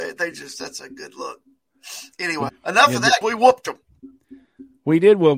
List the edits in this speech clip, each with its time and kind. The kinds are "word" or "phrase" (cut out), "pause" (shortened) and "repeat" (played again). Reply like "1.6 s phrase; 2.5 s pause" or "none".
2.5 s word; 3.2 s word